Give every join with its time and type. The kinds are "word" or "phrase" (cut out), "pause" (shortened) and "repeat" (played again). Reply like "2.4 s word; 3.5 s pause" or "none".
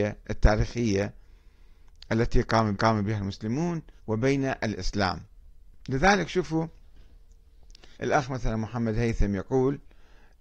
2.7 s repeat; 4.0 s pause; 7.9 s pause